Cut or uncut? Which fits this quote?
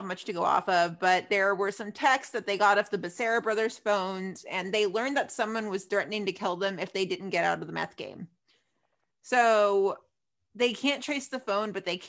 uncut